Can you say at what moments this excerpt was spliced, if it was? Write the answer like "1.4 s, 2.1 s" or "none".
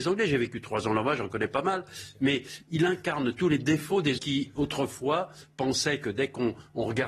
4.2 s